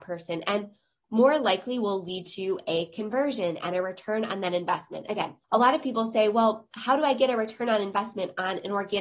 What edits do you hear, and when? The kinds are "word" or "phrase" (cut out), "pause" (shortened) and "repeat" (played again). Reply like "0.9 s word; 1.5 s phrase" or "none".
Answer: 5.4 s pause